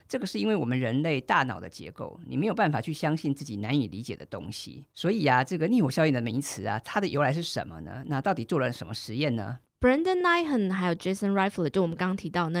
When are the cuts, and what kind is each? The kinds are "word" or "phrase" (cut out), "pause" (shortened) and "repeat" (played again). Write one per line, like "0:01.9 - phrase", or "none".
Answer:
none